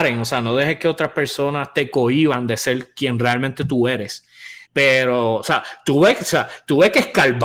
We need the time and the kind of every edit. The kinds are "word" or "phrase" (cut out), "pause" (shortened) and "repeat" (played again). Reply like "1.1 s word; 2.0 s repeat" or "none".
4.6 s pause